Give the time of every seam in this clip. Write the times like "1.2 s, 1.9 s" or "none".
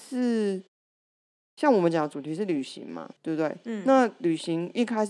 3.2 s